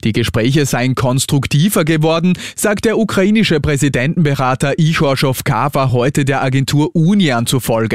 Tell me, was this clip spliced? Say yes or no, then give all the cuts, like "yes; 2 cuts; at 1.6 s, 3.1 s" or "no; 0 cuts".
no; 0 cuts